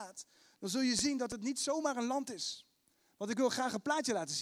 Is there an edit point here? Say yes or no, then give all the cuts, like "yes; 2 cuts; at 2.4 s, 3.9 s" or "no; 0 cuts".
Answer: no; 0 cuts